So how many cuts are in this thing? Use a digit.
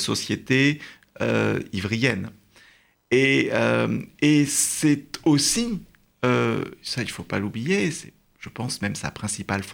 0